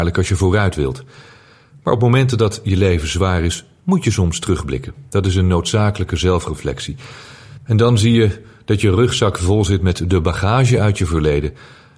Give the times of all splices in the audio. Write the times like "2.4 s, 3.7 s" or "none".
none